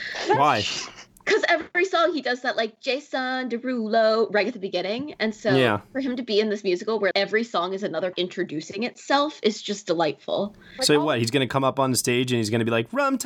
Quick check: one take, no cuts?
no; 2 cuts; at 7.1 s, 8.1 s

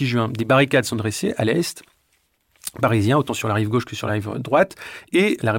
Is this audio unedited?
yes; 0 cuts

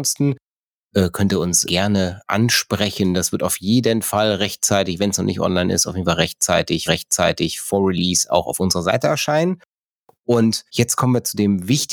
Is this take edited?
yes; 3 cuts; at 1.7 s, 6.9 s, 10.7 s

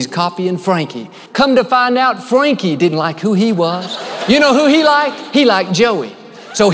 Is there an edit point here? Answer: yes; 2 cuts; at 1.3 s, 2.9 s

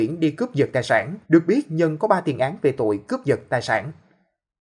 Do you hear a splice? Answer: yes; 1 cut; at 1.2 s

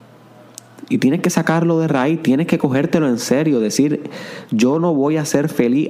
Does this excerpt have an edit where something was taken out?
no; 0 cuts

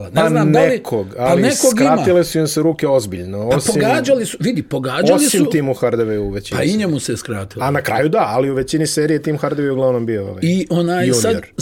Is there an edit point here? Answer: no; 0 cuts

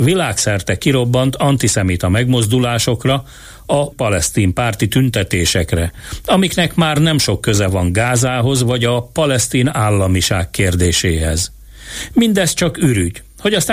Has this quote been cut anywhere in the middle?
yes; 1 cut; at 3.9 s

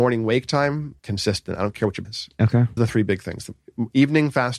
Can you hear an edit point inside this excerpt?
yes; 3 cuts; at 1.0 s, 2.0 s, 2.8 s

